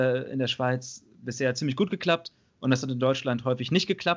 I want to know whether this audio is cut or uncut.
uncut